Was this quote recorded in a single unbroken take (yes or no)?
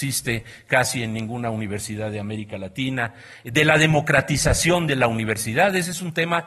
yes